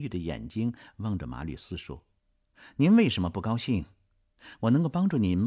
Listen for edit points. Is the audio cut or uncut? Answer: uncut